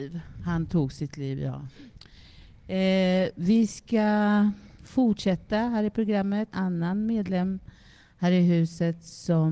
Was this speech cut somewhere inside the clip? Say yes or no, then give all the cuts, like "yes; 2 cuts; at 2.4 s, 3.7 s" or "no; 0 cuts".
yes; 1 cut; at 6.5 s